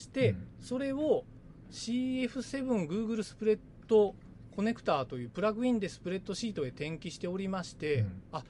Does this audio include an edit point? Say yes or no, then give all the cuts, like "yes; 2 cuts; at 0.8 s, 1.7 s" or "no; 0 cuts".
no; 0 cuts